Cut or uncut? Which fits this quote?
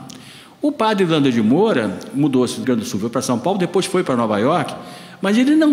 cut